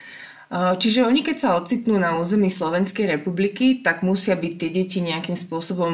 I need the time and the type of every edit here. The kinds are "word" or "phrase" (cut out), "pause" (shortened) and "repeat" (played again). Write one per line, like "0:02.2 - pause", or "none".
none